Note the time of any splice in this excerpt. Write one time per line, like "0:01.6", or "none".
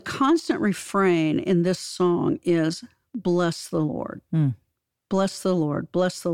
none